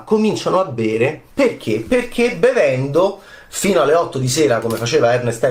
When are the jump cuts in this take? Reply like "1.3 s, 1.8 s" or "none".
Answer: 1.3 s